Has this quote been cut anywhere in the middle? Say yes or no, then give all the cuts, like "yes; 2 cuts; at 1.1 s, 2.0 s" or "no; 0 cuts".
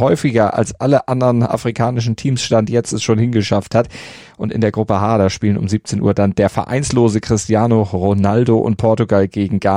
no; 0 cuts